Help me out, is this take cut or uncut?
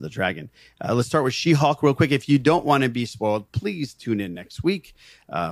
uncut